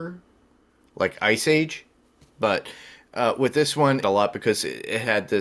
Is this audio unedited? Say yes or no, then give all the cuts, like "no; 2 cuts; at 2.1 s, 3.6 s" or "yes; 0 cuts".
no; 1 cut; at 4.0 s